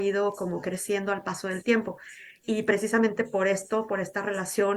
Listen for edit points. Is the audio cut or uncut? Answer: uncut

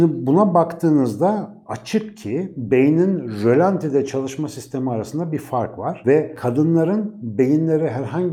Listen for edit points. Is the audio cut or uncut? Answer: uncut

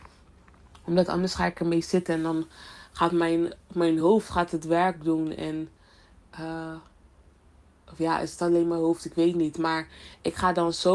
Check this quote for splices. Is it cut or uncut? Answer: uncut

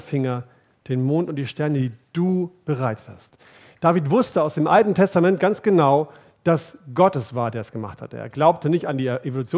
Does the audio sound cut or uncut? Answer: uncut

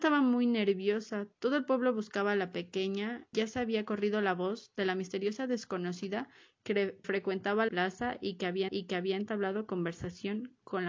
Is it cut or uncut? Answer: cut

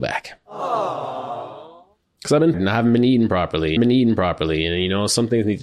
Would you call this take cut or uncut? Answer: cut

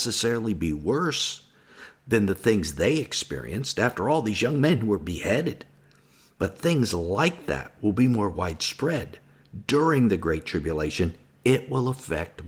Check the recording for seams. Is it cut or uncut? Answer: uncut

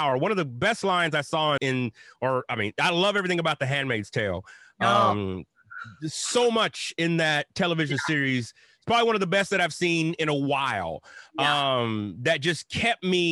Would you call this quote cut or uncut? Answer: cut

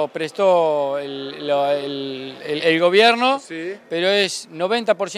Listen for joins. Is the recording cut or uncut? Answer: uncut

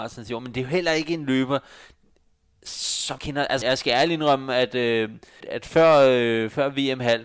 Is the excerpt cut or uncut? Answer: cut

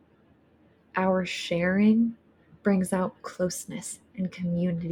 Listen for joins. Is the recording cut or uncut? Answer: uncut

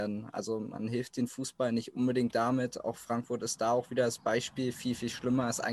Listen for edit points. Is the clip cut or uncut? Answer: uncut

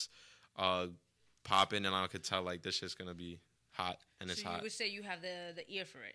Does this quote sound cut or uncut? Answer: uncut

